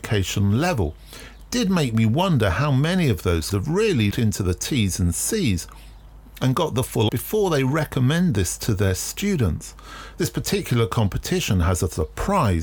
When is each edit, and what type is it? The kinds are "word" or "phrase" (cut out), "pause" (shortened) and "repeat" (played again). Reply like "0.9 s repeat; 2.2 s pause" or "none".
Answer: 3.5 s word; 4.1 s word; 7.1 s word